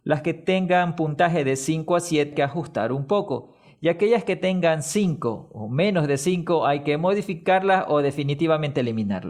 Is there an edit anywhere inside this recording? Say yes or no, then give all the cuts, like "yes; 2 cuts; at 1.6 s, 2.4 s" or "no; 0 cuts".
yes; 1 cut; at 2.3 s